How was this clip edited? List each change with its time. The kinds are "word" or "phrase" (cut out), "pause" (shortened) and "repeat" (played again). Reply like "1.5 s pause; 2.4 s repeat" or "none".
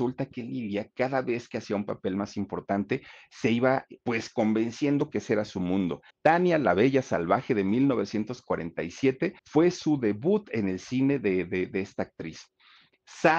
4.0 s pause; 6.1 s pause; 9.4 s pause